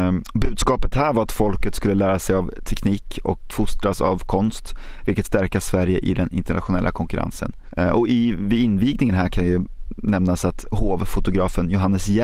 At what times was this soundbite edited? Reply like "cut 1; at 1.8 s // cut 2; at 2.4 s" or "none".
cut 1; at 3.5 s // cut 2; at 5.3 s